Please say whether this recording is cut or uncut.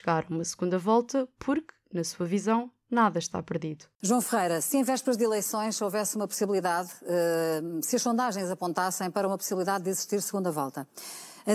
uncut